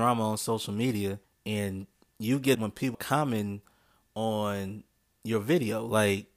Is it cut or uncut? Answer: cut